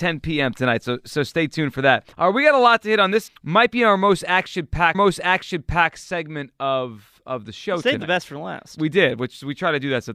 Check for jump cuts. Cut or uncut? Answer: cut